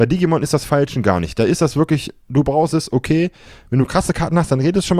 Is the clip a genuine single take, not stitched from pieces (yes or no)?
yes